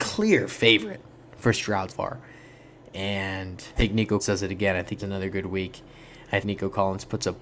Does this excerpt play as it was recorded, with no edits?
no; 6 cuts; at 1.5 s, 1.9 s, 3.8 s, 4.2 s, 5.0 s, 6.4 s

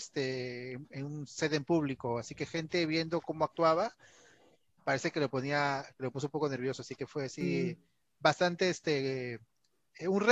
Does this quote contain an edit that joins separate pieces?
no; 0 cuts

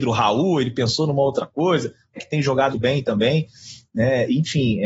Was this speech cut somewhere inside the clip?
yes; 2 cuts; at 2.2 s, 2.7 s

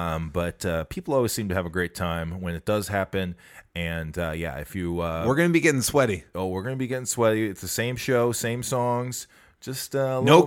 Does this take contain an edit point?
no; 0 cuts

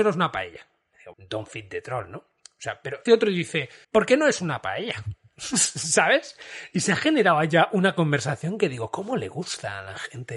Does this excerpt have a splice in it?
yes; 3 cuts; at 1.1 s, 3.1 s, 3.8 s

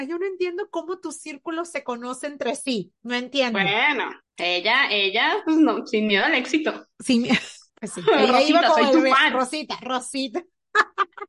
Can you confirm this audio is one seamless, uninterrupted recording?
yes; 0 cuts

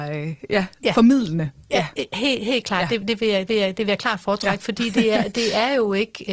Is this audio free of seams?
no; 1 cut; at 3.5 s

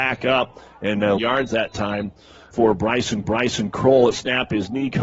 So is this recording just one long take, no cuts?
no; 4 cuts; at 1.2 s, 2.5 s, 3.2 s, 4.1 s

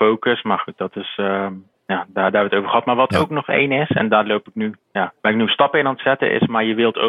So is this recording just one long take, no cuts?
no; 2 cuts; at 1.8 s, 5.2 s

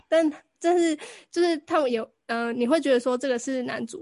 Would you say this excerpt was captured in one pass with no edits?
yes; 0 cuts

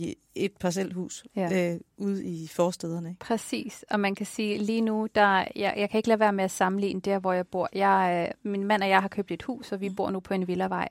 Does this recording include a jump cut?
no; 0 cuts

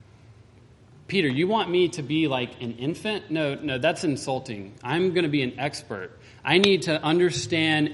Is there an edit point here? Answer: no; 0 cuts

